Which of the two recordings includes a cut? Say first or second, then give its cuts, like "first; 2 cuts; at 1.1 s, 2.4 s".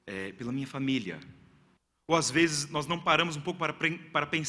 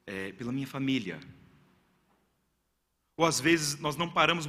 first; 1 cut; at 1.8 s